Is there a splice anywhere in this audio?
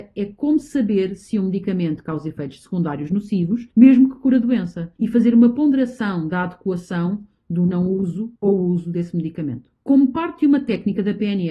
yes; 4 cuts; at 3.7 s, 5.0 s, 8.4 s, 9.8 s

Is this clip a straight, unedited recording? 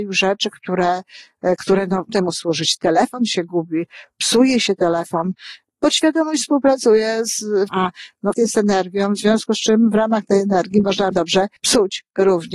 no; 5 cuts; at 2.1 s, 7.7 s, 8.3 s, 11.1 s, 11.6 s

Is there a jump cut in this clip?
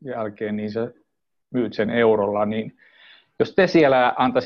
no; 0 cuts

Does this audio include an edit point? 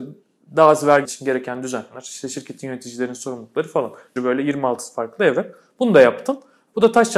yes; 2 cuts; at 1.0 s, 4.2 s

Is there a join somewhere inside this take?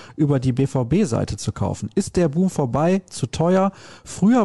no; 0 cuts

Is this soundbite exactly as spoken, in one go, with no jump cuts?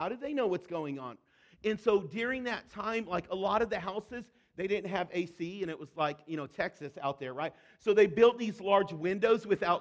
yes; 0 cuts

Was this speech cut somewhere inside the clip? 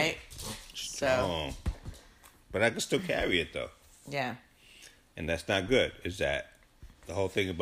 no; 0 cuts

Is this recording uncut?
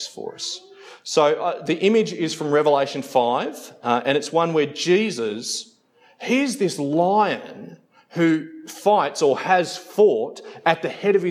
yes; 0 cuts

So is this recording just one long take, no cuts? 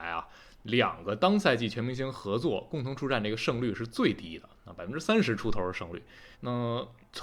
no; 1 cut; at 6.3 s

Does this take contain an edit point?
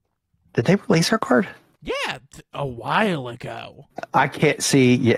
no; 0 cuts

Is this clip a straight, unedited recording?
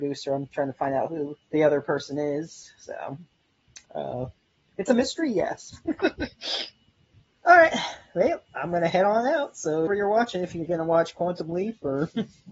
no; 4 cuts; at 1.4 s, 3.8 s, 7.3 s, 9.9 s

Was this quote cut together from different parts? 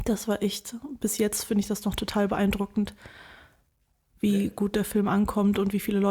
no; 0 cuts

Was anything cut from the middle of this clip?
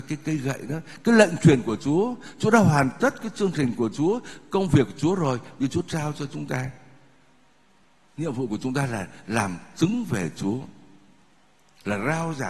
no; 0 cuts

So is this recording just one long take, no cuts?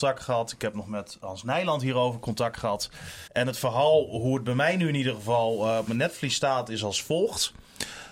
no; 1 cut; at 3.3 s

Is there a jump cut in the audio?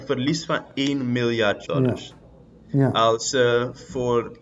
yes; 1 cut; at 1.7 s

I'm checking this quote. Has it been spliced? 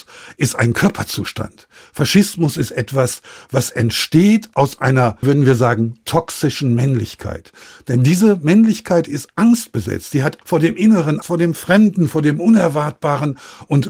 yes; 3 cuts; at 5.2 s, 10.4 s, 11.2 s

